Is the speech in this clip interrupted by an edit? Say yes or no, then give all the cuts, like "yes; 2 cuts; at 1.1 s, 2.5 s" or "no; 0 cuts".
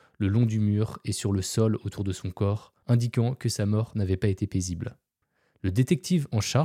yes; 2 cuts; at 2.8 s, 5.2 s